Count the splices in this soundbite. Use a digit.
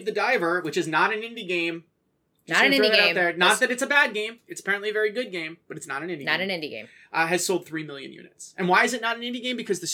0